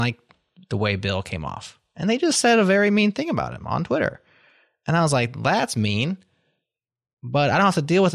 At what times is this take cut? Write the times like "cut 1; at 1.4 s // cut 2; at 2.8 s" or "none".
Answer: none